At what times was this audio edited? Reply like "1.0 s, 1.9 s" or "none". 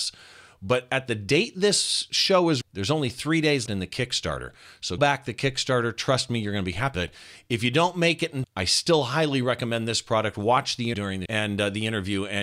2.6 s, 3.7 s, 5.0 s, 6.9 s, 8.4 s, 10.9 s, 11.3 s